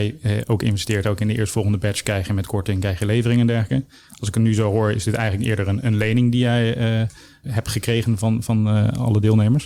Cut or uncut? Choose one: cut